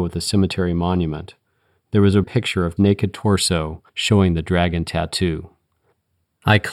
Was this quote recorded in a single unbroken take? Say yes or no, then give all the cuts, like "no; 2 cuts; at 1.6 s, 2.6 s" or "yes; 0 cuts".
no; 3 cuts; at 2.2 s, 2.8 s, 3.9 s